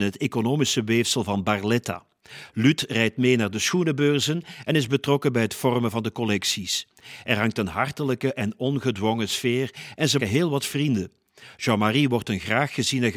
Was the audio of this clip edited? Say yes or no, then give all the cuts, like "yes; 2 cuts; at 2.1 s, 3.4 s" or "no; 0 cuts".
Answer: yes; 1 cut; at 10.2 s